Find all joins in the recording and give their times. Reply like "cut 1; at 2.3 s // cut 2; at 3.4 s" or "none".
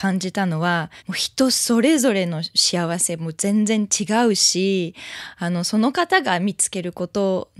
cut 1; at 1.0 s